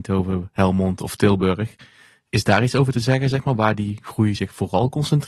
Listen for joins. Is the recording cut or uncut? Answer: uncut